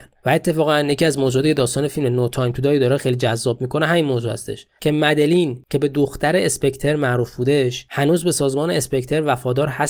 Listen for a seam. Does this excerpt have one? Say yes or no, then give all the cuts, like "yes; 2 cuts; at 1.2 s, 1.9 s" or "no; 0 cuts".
no; 0 cuts